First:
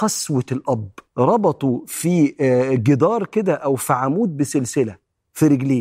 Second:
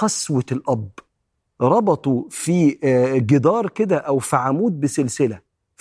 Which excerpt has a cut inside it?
first; 1 cut; at 1.1 s

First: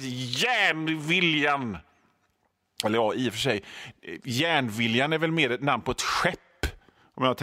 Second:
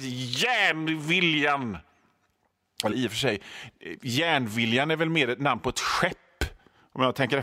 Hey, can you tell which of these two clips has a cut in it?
second; 1 cut; at 2.9 s

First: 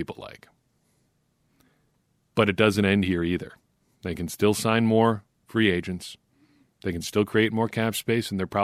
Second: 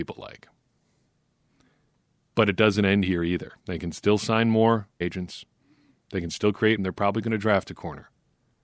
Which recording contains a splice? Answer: second; 3 cuts; at 3.6 s, 5.0 s, 6.8 s

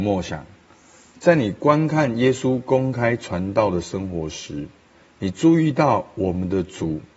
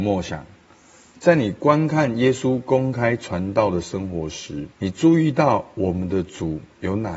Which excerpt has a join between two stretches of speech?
second; 1 cut; at 4.7 s

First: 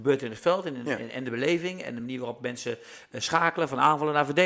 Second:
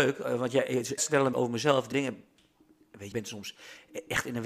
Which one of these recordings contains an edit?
second; 4 cuts; at 1.0 s, 1.3 s, 1.9 s, 3.1 s

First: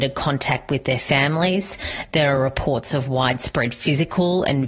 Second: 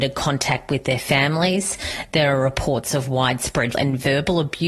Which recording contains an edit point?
second; 1 cut; at 3.7 s

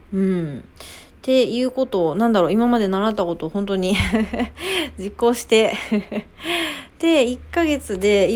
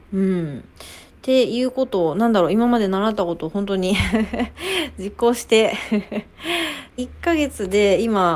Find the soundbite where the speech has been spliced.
second; 1 cut; at 7.0 s

